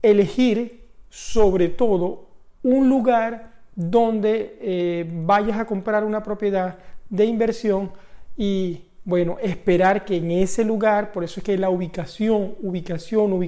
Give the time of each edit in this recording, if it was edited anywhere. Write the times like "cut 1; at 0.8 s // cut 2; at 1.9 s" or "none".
cut 1; at 2.5 s